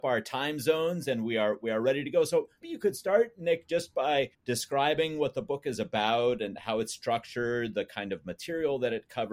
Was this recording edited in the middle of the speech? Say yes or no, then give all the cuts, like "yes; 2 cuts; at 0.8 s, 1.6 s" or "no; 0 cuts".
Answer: yes; 2 cuts; at 2.6 s, 4.3 s